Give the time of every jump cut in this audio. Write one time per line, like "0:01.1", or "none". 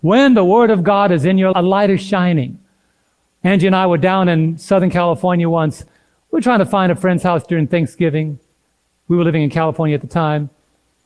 0:01.5